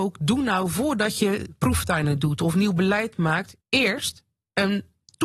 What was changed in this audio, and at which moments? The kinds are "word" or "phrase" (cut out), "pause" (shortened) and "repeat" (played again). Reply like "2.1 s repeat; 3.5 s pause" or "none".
3.6 s pause

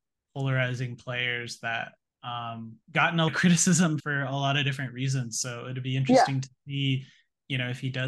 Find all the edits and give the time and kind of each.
2.1 s word; 2.8 s pause; 3.3 s word; 4.0 s word

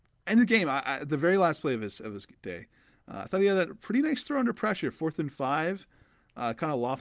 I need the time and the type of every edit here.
none

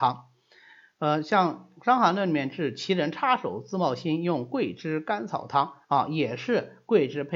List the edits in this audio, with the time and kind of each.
5.8 s pause

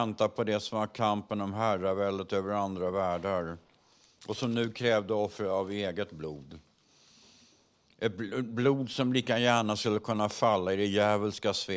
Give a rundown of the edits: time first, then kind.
none

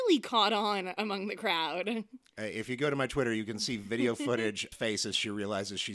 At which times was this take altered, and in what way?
4.7 s phrase

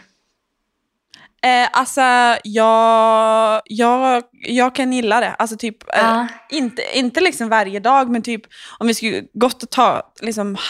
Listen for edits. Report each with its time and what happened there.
none

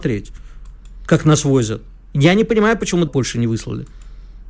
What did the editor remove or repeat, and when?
3.1 s phrase

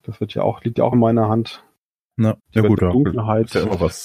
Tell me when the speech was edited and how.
2.4 s pause

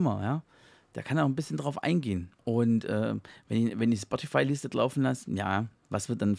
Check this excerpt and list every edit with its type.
2.4 s pause

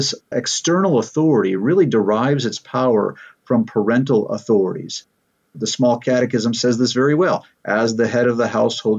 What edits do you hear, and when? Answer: none

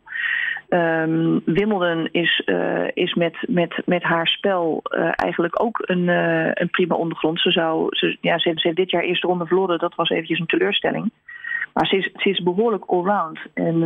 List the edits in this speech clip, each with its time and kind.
8.6 s repeat

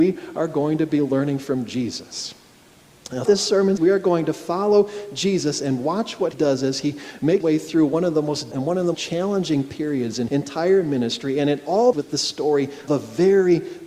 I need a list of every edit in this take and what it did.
3.3 s word; 3.8 s word; 6.3 s word; 7.4 s word; 8.5 s word; 8.9 s word; 10.3 s word; 11.9 s word; 12.9 s word

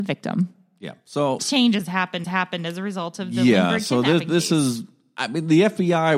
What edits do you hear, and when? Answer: 1.4 s phrase; 2.2 s repeat

